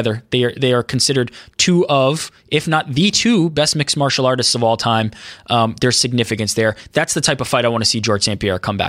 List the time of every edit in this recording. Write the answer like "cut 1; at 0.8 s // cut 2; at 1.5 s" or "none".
none